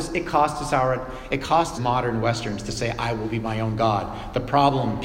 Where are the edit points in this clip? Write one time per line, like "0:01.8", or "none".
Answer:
0:01.7